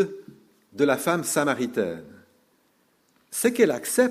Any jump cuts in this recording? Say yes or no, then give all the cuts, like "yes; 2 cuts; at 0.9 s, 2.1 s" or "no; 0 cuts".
no; 0 cuts